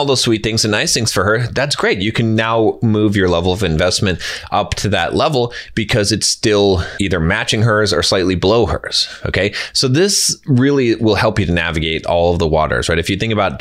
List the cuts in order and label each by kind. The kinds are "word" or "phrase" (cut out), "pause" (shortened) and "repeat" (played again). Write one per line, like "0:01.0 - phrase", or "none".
none